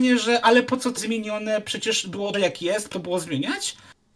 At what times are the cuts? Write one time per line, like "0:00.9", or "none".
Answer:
0:01.0
0:02.3
0:02.9